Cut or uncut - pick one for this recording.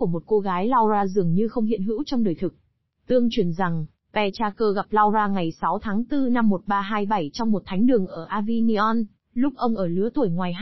uncut